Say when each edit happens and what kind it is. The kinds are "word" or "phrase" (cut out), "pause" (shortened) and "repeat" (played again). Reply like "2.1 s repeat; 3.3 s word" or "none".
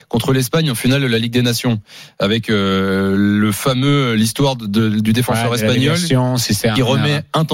none